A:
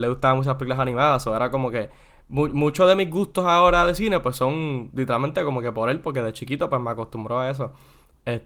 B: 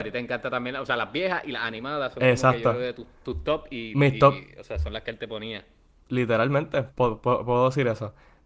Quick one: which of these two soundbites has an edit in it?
B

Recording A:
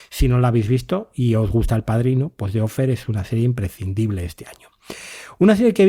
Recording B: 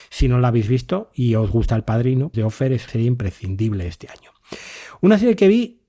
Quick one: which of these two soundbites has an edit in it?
B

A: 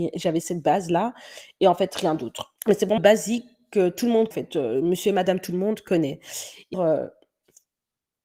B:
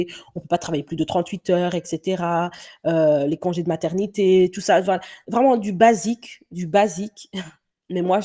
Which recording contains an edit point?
A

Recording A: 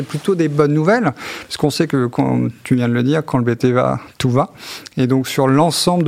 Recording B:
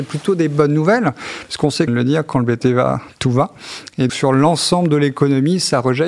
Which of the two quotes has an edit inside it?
B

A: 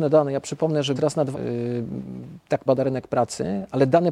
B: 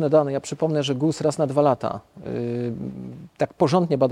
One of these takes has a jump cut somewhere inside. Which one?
A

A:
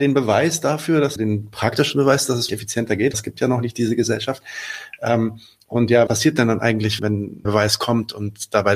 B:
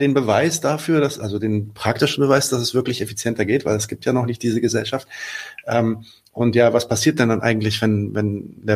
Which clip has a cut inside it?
A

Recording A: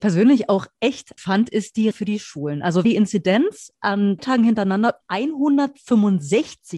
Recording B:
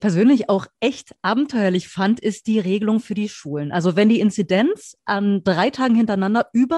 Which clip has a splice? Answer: A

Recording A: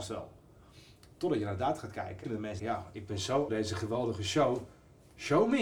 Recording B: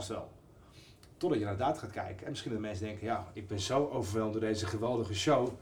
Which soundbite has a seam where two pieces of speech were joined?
A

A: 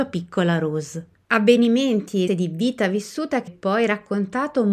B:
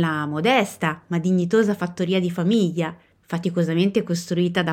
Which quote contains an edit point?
A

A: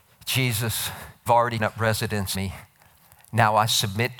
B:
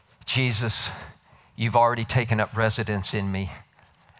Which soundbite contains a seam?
A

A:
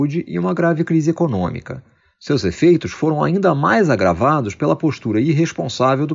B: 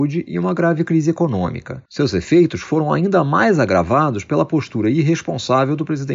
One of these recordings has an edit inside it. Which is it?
B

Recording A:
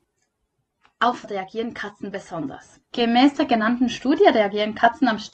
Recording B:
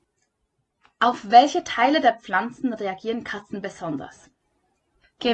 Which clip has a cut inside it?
A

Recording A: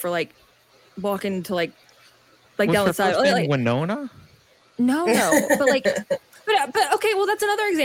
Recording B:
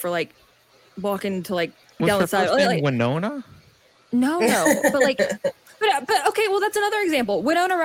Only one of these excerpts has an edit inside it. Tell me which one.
B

